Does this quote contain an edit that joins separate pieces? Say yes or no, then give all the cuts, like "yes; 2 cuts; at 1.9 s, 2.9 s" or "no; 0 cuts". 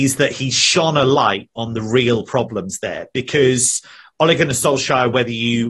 no; 0 cuts